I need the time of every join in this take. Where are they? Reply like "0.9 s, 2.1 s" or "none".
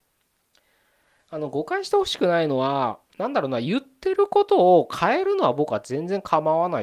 3.1 s